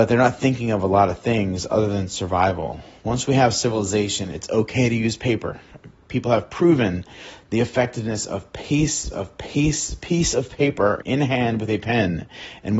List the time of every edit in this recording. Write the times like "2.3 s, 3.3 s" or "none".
9.1 s, 11.0 s